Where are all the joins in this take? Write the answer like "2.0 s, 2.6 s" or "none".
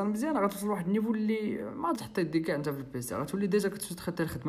1.9 s